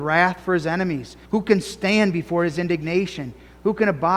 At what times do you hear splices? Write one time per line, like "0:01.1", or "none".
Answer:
0:01.2